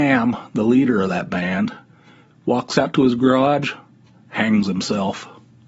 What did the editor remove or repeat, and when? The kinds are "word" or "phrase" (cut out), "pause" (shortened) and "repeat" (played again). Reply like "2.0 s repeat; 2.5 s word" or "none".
none

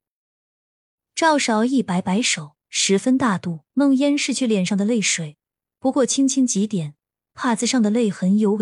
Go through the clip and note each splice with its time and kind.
3.7 s pause

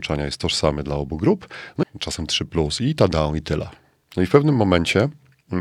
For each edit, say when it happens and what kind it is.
1.8 s phrase

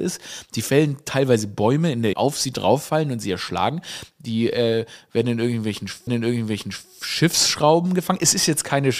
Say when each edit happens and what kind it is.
2.1 s phrase; 6.1 s repeat

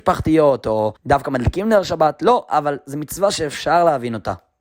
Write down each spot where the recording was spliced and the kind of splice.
1.0 s pause

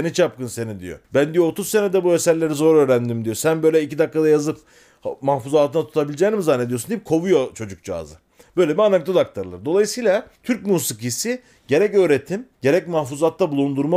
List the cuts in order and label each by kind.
1.0 s pause; 10.3 s pause; 12.5 s pause

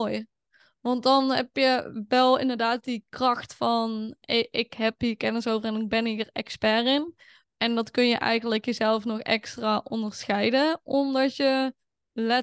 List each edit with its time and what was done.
none

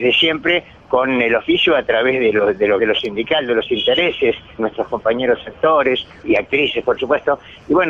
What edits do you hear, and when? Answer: 2.8 s word; 4.6 s word; 6.2 s word

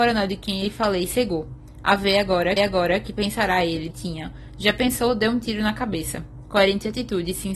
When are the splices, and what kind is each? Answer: 2.6 s repeat; 3.9 s phrase

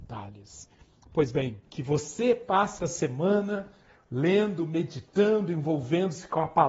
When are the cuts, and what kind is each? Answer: 1.7 s pause; 2.8 s word

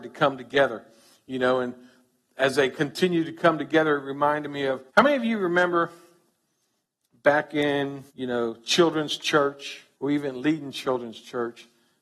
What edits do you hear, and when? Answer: 4.9 s pause; 8.1 s pause; 9.9 s pause

